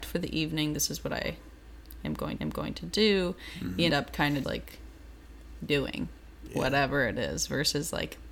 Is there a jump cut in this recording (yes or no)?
yes